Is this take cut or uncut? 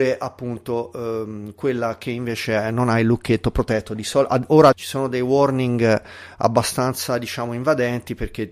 cut